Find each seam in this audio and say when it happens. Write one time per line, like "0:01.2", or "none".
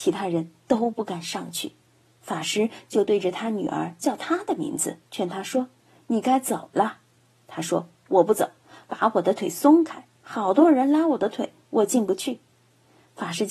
0:05.1